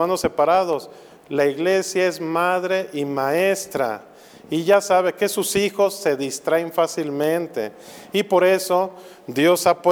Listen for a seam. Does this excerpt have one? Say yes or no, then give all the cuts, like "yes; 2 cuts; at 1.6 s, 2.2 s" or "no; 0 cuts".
no; 0 cuts